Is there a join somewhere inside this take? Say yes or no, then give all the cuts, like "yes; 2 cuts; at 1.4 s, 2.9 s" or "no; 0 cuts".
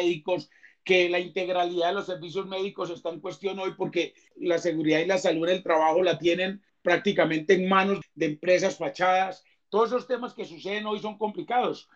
no; 0 cuts